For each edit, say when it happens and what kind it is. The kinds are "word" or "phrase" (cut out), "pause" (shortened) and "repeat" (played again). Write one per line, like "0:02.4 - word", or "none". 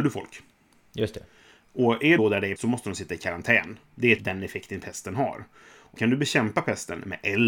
0:02.2 - word
0:02.6 - word
0:04.2 - word
0:06.0 - word